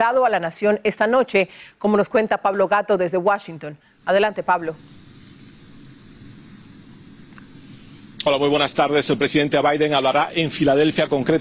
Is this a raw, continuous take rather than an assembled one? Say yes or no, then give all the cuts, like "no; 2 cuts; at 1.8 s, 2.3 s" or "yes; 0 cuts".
yes; 0 cuts